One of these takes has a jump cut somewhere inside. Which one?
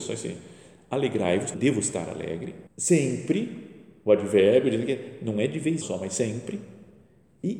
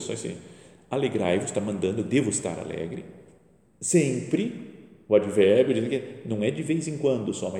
first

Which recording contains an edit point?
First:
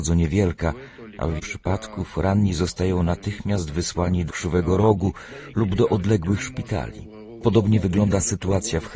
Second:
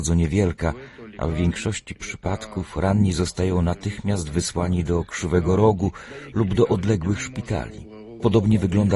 first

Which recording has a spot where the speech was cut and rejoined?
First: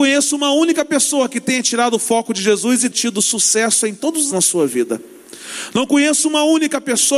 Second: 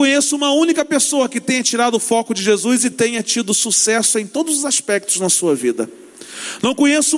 first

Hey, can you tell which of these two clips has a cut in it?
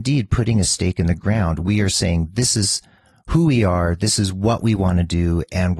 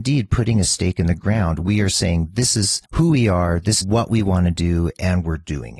second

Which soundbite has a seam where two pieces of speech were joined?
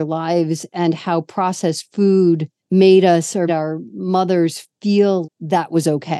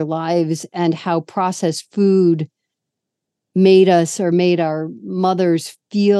first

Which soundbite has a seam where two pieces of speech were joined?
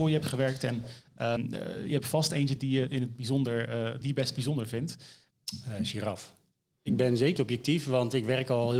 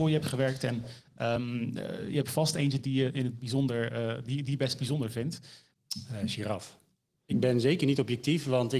first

